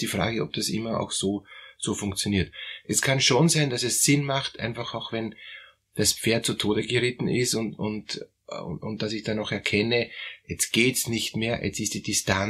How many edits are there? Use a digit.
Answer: 0